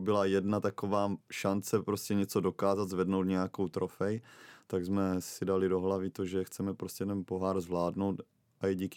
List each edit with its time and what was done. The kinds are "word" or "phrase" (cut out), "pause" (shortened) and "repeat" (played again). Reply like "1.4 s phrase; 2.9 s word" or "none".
1.2 s pause

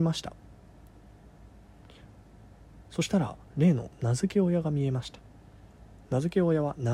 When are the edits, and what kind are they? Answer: none

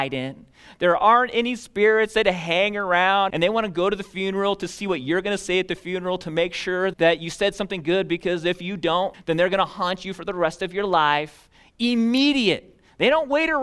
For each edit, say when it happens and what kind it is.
3.3 s word; 6.9 s word; 9.1 s word

